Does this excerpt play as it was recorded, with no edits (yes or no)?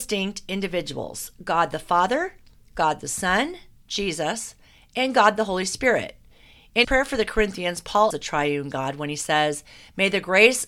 no